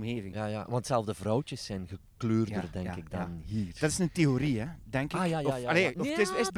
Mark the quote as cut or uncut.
uncut